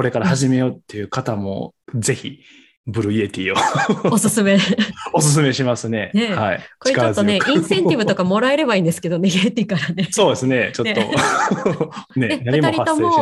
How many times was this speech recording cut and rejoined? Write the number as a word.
one